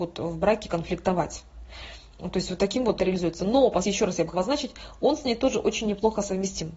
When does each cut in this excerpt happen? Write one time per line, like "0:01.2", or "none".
0:03.0
0:03.8
0:04.3